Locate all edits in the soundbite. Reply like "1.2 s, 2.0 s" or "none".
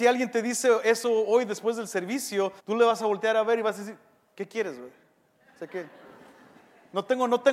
2.6 s